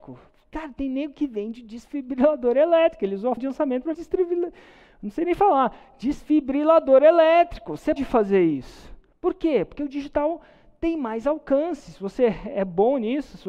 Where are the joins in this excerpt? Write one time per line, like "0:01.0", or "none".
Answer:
0:03.4
0:03.9
0:08.0